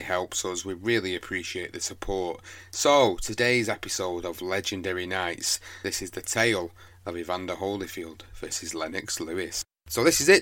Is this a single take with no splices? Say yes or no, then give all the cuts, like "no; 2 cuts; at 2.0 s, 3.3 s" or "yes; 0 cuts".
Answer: yes; 0 cuts